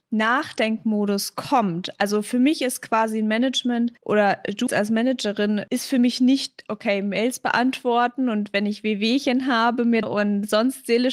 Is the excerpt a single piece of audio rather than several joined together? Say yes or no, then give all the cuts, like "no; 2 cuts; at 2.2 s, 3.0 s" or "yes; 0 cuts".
no; 4 cuts; at 4.0 s, 4.7 s, 6.7 s, 10.0 s